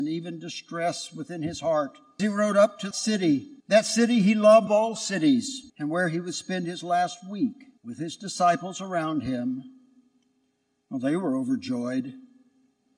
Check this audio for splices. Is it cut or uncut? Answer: cut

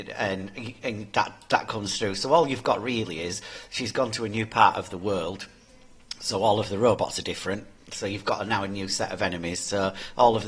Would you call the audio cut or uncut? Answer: uncut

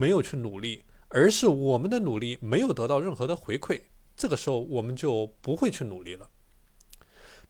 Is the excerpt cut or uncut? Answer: uncut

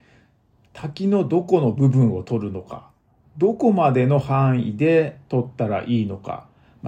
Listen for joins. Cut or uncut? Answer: uncut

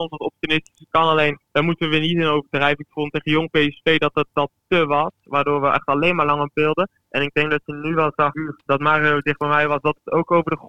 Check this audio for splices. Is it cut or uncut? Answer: cut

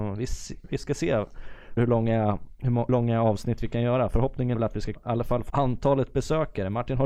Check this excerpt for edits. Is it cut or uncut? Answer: cut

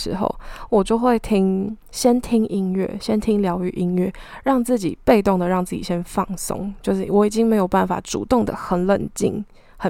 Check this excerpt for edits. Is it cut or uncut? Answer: cut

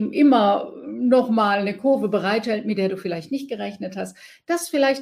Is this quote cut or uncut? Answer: uncut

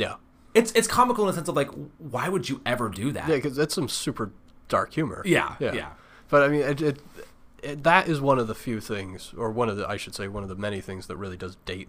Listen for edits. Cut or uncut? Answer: uncut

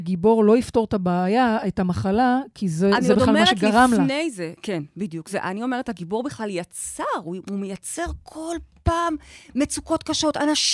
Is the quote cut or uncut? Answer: uncut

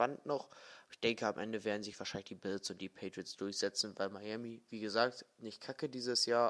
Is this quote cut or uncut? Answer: uncut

